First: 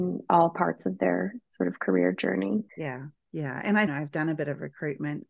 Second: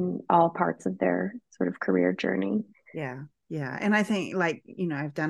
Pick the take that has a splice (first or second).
first